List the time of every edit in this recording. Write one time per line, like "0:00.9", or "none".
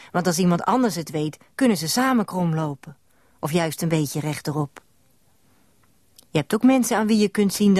none